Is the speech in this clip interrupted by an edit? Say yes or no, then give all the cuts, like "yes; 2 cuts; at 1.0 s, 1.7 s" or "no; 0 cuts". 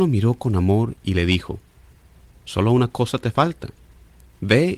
no; 0 cuts